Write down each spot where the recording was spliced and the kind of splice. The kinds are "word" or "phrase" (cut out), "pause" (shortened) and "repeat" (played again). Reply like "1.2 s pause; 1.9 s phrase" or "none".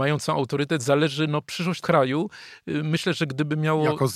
1.8 s word